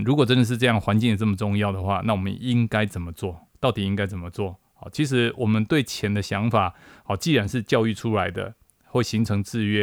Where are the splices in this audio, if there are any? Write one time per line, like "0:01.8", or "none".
0:03.5
0:04.7